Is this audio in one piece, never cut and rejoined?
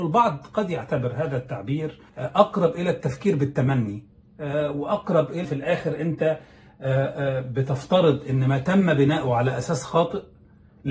no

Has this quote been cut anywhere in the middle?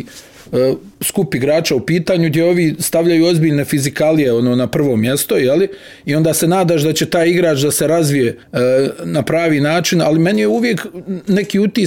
yes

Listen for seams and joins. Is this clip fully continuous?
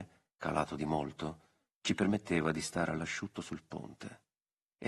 yes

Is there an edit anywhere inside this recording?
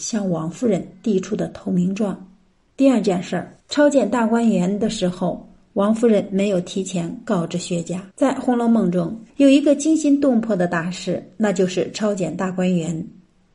yes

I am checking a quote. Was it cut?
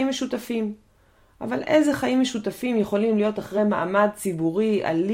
no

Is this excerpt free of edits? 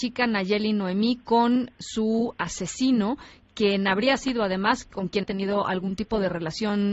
no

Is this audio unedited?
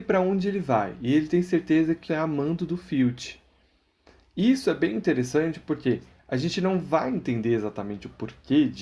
no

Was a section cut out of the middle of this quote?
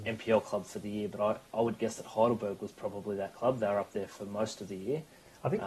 no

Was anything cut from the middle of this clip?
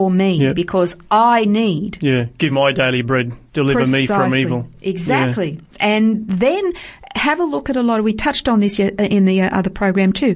yes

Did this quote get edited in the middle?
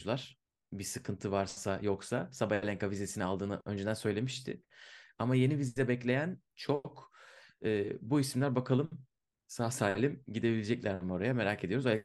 no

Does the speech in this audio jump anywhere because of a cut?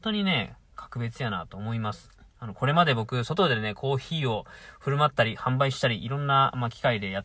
no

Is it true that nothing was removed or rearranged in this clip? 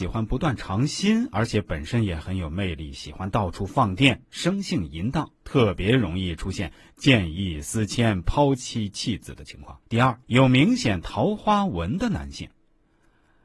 no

